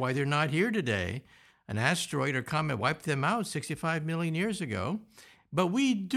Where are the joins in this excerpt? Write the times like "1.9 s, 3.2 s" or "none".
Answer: none